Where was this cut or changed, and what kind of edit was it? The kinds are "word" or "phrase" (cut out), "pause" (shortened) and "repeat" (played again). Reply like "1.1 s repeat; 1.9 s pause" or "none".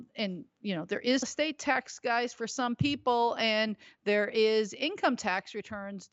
1.2 s word